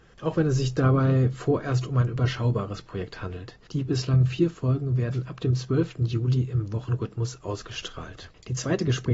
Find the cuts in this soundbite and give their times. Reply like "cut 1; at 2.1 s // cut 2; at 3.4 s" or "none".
none